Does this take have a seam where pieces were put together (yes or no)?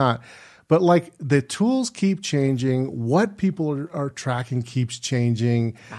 no